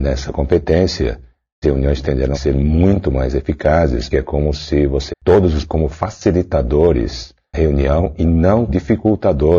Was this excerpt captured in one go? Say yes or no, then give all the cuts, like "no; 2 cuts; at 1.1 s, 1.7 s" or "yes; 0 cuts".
no; 7 cuts; at 1.6 s, 2.3 s, 4.1 s, 5.1 s, 5.7 s, 7.5 s, 8.7 s